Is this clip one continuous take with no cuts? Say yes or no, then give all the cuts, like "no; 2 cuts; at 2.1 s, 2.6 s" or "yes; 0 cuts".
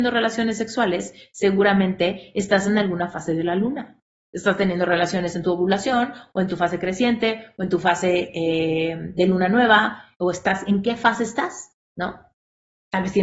yes; 0 cuts